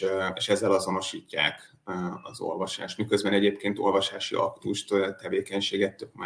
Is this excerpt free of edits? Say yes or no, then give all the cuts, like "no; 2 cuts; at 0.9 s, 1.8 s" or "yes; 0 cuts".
yes; 0 cuts